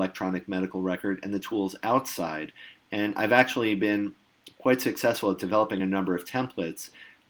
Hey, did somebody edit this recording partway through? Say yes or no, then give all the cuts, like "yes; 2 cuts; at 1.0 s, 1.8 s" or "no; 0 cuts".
no; 0 cuts